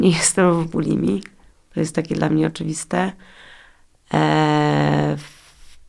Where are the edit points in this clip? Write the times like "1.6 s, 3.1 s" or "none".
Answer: 1.5 s